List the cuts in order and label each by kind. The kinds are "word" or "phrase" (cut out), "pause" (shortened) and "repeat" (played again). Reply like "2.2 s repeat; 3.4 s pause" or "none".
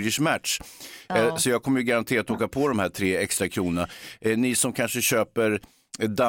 none